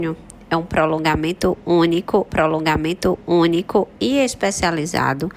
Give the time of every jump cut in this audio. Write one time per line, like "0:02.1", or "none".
0:02.3